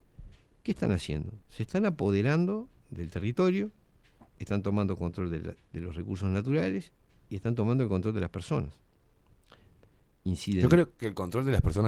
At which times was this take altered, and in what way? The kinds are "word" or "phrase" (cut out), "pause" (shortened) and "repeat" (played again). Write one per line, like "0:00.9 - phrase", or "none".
0:02.8 - pause

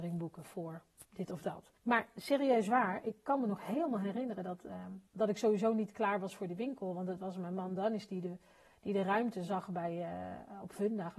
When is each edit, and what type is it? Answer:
0:01.8 - pause
0:05.1 - pause

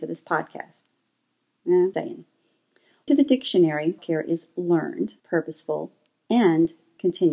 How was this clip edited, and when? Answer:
0:01.9 - word
0:03.1 - phrase
0:04.0 - word
0:05.2 - pause

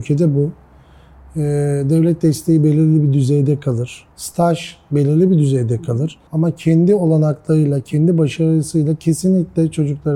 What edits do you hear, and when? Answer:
0:04.1 - pause
0:06.3 - pause

